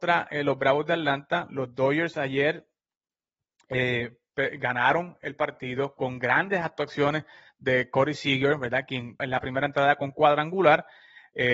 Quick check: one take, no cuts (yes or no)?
no